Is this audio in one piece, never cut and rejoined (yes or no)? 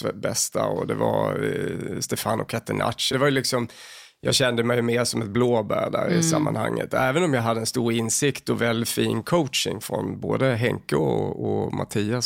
no